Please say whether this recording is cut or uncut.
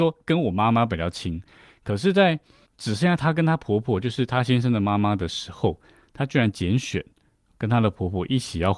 uncut